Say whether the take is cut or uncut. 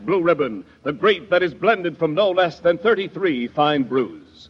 cut